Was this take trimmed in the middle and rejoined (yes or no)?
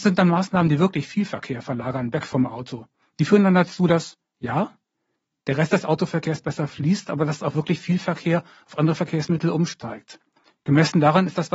no